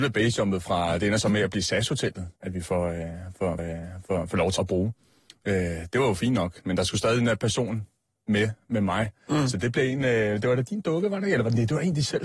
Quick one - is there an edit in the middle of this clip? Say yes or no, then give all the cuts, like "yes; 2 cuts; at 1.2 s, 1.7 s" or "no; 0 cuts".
yes; 3 cuts; at 2.4 s, 3.6 s, 4.6 s